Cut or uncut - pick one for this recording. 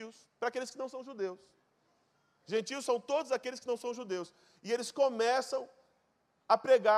uncut